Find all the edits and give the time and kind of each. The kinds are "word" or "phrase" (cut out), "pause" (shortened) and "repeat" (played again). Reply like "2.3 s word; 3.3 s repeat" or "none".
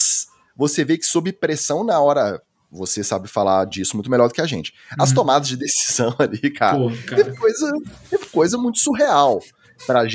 none